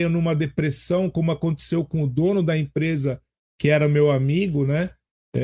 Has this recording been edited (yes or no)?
no